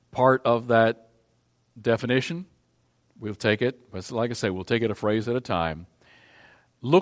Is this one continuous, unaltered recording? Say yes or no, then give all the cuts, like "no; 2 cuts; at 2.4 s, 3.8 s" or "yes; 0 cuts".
yes; 0 cuts